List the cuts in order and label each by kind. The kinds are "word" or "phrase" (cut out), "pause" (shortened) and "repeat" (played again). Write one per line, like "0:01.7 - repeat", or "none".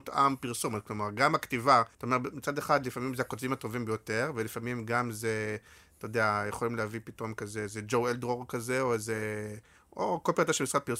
0:01.9 - pause